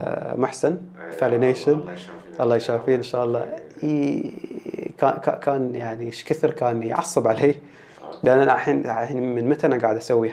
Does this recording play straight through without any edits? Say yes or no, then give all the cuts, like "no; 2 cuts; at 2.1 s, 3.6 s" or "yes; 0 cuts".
yes; 0 cuts